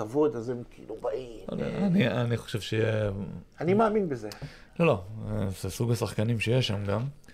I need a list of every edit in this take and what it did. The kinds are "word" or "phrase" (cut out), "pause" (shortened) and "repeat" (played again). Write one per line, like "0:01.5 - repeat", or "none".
none